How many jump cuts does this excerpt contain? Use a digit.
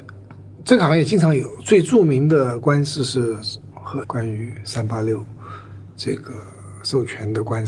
2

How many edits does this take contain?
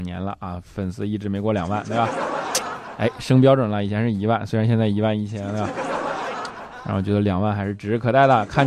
0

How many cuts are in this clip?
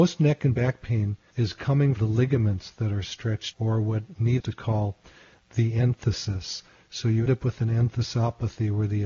5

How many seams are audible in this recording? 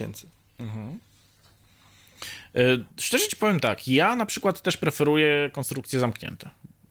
0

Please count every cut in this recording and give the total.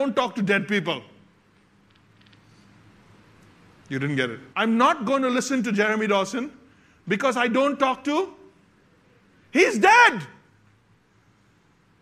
1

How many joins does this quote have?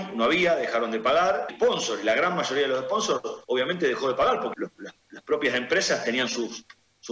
3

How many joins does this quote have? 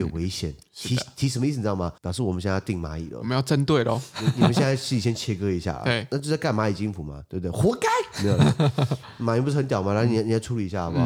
1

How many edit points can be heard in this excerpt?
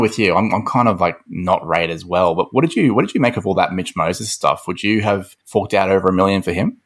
1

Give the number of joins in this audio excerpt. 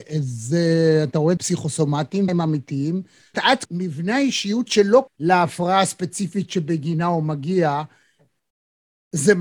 6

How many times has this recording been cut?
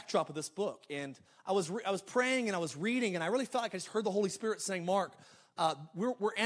0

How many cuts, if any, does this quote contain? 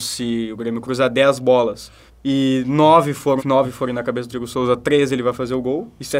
3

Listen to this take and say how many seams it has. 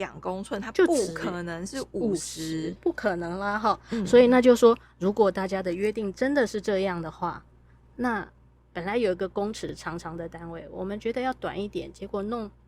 1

